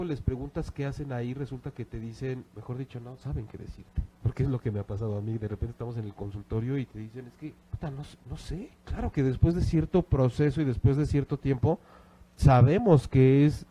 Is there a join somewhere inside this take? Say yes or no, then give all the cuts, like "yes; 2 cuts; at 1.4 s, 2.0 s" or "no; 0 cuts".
yes; 4 cuts; at 2.5 s, 4.2 s, 7.6 s, 8.8 s